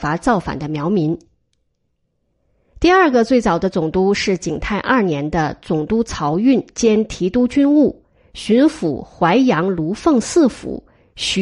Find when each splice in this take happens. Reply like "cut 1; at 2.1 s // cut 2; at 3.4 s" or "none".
none

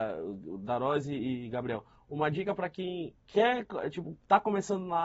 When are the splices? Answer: cut 1; at 3.2 s

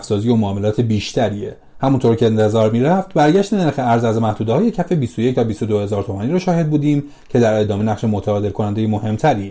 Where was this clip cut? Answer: cut 1; at 7.8 s

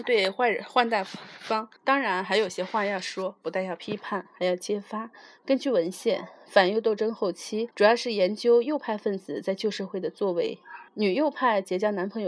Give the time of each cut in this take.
cut 1; at 1.8 s // cut 2; at 7.7 s // cut 3; at 10.9 s

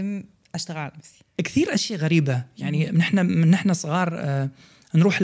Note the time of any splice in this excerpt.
none

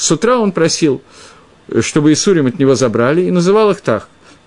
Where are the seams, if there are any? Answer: none

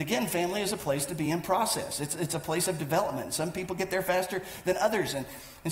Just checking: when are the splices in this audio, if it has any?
none

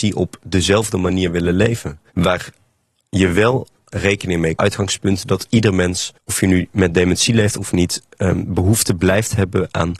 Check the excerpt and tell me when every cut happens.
cut 1; at 2.1 s // cut 2; at 3.9 s // cut 3; at 4.6 s // cut 4; at 6.2 s

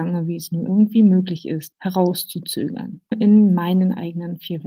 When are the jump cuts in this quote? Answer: cut 1; at 3.1 s

